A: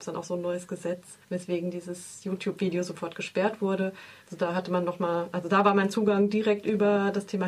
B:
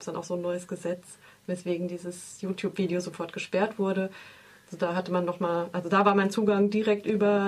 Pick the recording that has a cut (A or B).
A